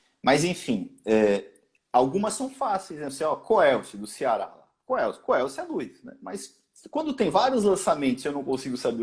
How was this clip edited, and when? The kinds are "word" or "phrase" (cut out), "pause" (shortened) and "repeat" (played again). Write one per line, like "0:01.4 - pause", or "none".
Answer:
none